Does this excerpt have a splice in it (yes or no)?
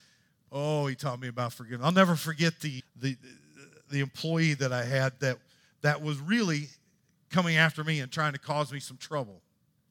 yes